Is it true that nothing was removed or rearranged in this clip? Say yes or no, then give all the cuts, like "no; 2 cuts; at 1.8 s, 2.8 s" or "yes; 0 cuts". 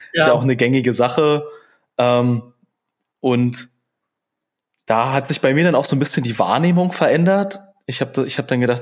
yes; 0 cuts